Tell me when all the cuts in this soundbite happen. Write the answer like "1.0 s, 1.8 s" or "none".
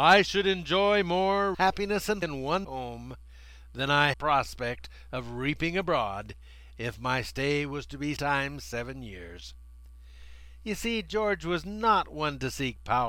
1.5 s, 2.2 s, 2.6 s, 4.1 s, 8.2 s